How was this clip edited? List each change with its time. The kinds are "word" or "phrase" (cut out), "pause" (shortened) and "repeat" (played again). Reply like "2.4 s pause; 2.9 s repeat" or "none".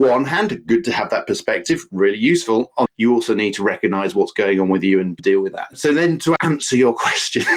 2.9 s phrase; 6.4 s word